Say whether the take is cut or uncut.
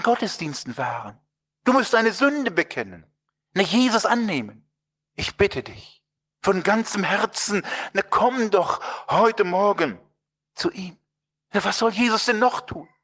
uncut